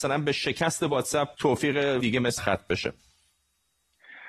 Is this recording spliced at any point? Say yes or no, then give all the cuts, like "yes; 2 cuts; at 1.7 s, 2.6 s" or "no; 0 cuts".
yes; 3 cuts; at 1.3 s, 2.0 s, 2.4 s